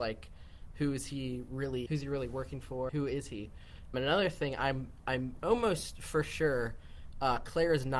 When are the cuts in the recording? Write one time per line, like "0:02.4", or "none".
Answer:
0:01.9
0:02.9
0:03.9